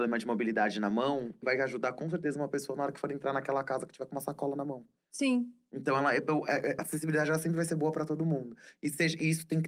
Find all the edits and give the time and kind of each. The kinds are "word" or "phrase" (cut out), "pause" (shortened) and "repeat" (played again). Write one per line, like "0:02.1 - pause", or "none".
0:01.4 - word
0:06.8 - word